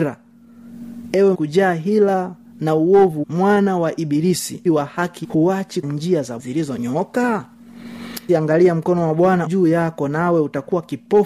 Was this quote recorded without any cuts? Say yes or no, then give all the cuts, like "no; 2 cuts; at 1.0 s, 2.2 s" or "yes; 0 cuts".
no; 8 cuts; at 1.3 s, 3.2 s, 4.7 s, 5.2 s, 5.8 s, 6.4 s, 8.3 s, 9.5 s